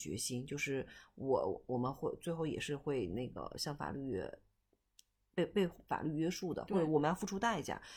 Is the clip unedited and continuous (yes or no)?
yes